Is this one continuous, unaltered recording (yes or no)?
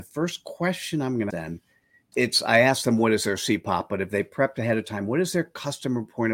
no